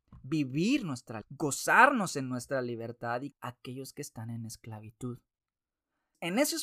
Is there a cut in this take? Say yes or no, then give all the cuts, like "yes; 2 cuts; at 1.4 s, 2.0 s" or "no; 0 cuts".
yes; 2 cuts; at 1.2 s, 3.3 s